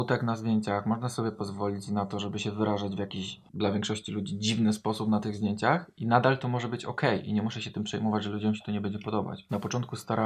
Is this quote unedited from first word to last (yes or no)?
no